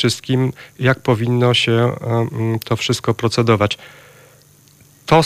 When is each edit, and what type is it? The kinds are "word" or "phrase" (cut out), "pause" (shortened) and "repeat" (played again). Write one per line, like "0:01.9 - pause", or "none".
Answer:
none